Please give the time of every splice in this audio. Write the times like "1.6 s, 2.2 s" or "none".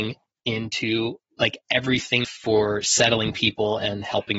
1.3 s, 2.2 s

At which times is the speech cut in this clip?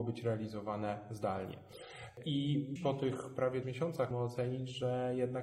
2.8 s, 3.6 s, 4.1 s

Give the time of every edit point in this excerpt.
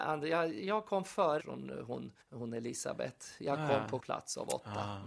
1.4 s, 2.2 s, 4.0 s

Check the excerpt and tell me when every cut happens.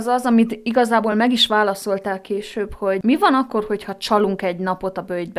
none

